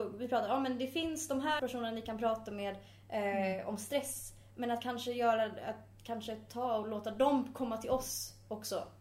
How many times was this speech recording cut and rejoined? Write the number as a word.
one